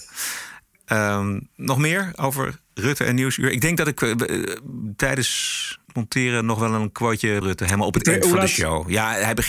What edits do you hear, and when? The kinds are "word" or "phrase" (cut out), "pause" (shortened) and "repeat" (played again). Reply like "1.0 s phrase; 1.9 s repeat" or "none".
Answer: 2.7 s pause; 5.8 s pause; 7.4 s phrase